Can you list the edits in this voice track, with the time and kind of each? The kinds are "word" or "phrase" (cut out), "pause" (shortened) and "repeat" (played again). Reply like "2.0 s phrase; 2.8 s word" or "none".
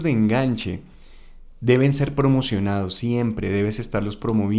none